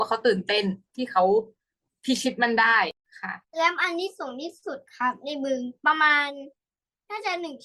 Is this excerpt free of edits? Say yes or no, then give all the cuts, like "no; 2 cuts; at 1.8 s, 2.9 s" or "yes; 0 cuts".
no; 2 cuts; at 3.5 s, 4.9 s